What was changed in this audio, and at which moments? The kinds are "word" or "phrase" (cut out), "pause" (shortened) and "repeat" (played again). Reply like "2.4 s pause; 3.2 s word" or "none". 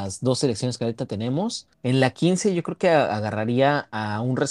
1.7 s pause